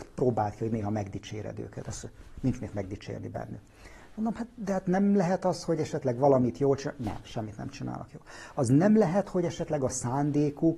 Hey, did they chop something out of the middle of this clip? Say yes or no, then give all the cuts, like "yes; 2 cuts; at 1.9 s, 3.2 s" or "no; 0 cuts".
no; 0 cuts